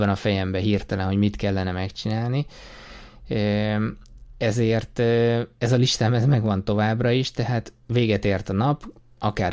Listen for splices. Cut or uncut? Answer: cut